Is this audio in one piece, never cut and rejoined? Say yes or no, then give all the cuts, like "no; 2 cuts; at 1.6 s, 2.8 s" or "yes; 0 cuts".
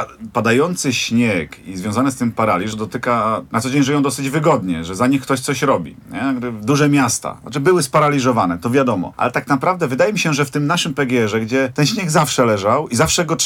no; 2 cuts; at 2.7 s, 3.5 s